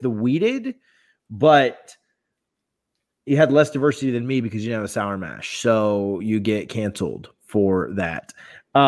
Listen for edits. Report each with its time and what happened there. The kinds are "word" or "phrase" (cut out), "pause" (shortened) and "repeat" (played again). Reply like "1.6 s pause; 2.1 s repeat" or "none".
none